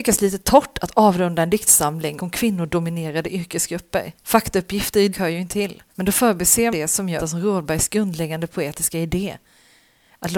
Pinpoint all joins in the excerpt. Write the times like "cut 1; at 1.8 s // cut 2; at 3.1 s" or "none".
cut 1; at 2.2 s // cut 2; at 4.1 s // cut 3; at 5.1 s // cut 4; at 5.5 s // cut 5; at 5.9 s // cut 6; at 6.7 s // cut 7; at 7.2 s